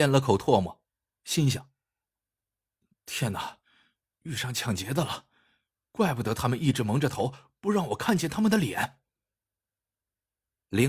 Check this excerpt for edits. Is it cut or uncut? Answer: uncut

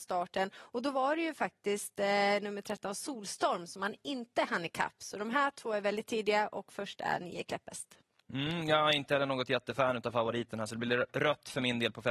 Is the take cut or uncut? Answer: uncut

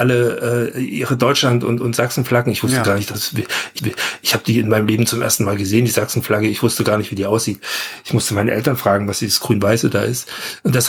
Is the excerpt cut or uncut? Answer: cut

